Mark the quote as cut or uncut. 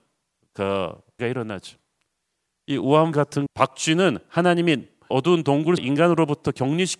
cut